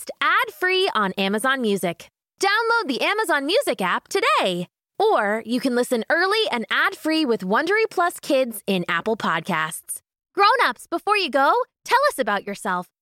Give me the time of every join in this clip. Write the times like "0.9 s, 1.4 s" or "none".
none